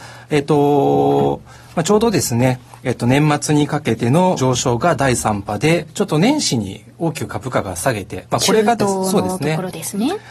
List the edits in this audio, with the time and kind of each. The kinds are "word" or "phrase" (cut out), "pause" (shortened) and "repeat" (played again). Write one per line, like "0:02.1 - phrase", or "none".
0:04.4 - word